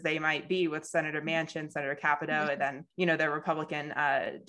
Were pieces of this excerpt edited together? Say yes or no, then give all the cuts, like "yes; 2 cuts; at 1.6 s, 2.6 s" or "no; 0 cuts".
yes; 1 cut; at 2.9 s